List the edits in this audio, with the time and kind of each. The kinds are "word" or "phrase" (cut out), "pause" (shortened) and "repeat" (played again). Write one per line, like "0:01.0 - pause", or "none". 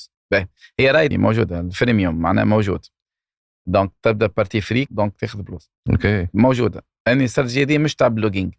0:01.1 - phrase
0:04.0 - pause
0:04.9 - phrase